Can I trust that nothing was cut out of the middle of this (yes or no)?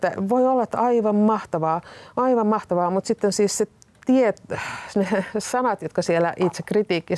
yes